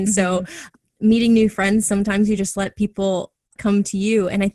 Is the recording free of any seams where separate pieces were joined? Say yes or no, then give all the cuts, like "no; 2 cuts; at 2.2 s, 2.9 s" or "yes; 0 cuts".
yes; 0 cuts